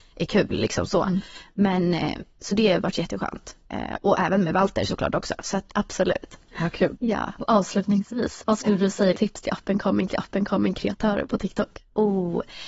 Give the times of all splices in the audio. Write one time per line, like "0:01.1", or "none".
0:05.7
0:09.1
0:10.1